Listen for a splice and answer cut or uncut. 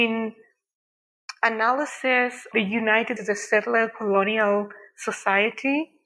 cut